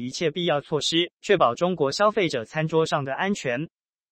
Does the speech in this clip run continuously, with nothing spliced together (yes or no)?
no